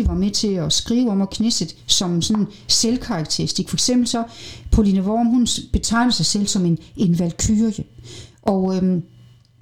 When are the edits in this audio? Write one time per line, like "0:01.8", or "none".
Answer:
none